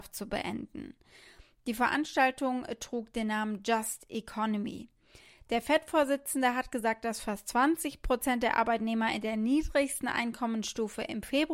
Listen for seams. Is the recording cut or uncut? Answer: uncut